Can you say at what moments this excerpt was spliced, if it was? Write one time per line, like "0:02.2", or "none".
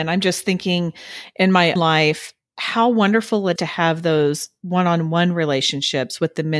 0:01.8
0:03.6